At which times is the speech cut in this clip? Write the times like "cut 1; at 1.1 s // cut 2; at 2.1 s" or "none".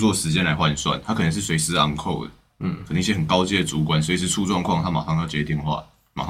none